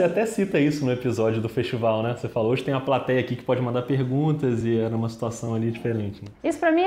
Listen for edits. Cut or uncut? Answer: uncut